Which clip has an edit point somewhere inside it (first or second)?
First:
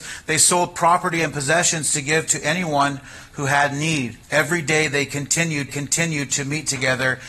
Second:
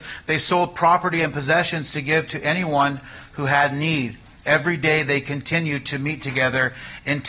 first